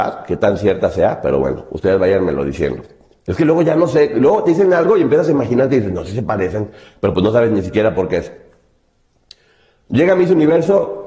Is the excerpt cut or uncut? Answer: uncut